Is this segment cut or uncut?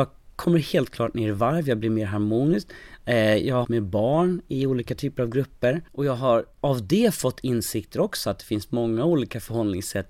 cut